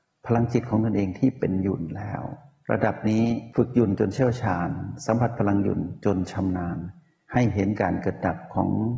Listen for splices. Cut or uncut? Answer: uncut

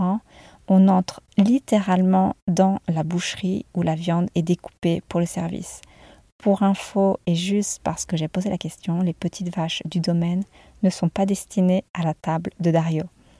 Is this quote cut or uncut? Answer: uncut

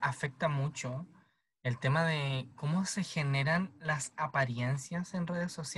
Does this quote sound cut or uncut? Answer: uncut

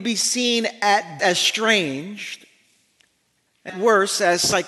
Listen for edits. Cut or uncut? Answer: cut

